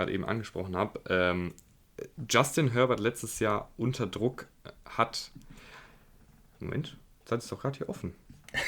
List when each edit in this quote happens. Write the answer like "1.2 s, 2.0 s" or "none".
none